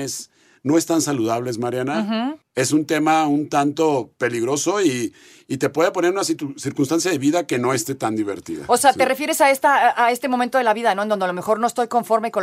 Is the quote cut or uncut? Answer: uncut